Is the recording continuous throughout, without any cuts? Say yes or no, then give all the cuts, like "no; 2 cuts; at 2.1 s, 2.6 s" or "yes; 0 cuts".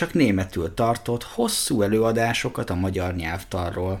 yes; 0 cuts